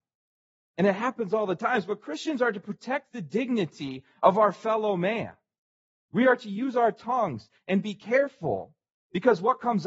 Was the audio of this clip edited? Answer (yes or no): no